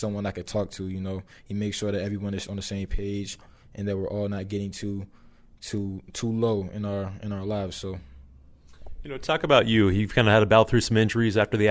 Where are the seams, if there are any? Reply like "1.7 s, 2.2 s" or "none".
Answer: none